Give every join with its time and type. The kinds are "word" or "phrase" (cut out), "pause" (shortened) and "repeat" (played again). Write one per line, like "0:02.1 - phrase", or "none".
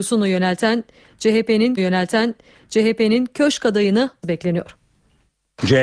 0:01.8 - repeat
0:04.2 - phrase